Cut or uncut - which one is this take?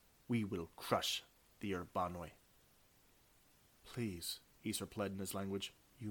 uncut